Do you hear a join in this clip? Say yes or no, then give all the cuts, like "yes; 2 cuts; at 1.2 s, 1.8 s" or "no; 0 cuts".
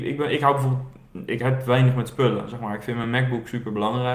no; 0 cuts